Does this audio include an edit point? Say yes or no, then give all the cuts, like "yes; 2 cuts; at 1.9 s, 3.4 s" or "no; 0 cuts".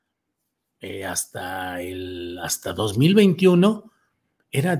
no; 0 cuts